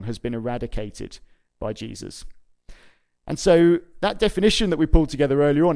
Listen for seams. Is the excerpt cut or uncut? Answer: uncut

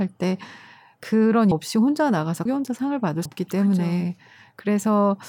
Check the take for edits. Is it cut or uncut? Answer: cut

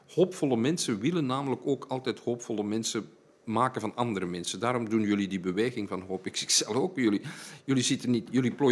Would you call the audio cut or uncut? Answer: uncut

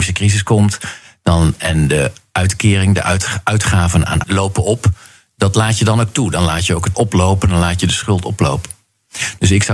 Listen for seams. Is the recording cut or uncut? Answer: cut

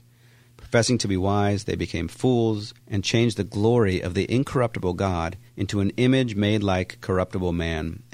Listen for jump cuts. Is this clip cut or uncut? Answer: cut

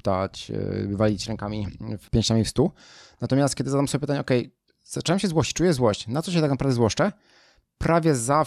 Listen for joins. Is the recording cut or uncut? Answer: uncut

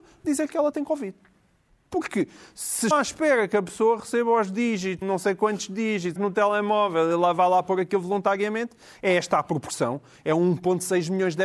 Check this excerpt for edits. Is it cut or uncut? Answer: cut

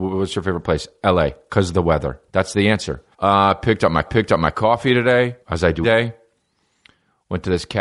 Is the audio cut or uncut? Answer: cut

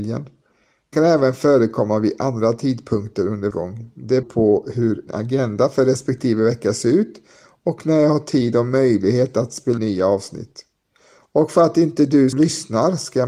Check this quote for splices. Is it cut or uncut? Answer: cut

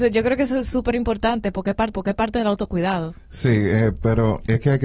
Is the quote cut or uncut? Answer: cut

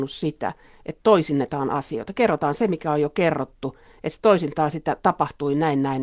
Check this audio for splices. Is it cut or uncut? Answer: uncut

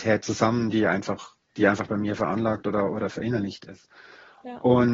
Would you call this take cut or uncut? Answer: uncut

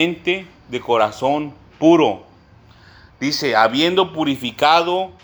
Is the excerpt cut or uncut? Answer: uncut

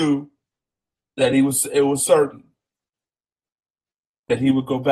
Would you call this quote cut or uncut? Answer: uncut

